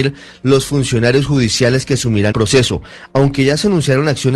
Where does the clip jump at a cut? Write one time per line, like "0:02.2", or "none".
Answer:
0:02.3